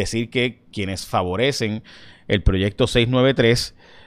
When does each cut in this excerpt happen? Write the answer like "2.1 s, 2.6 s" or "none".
none

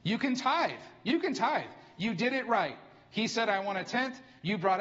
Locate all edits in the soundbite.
none

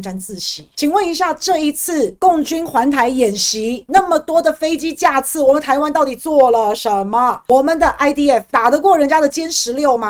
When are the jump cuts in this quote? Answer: none

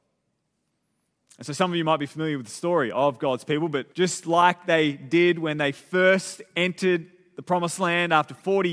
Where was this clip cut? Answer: 3.9 s

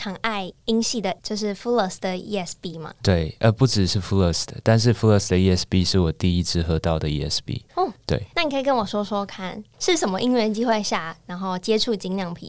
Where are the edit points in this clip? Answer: none

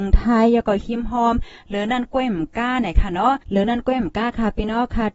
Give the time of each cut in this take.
3.4 s

